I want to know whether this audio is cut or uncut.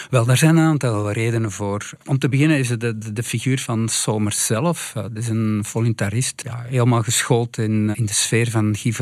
cut